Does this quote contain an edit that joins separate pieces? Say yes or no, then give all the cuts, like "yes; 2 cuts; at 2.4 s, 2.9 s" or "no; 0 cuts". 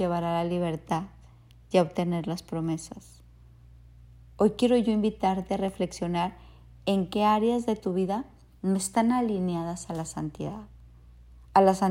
no; 0 cuts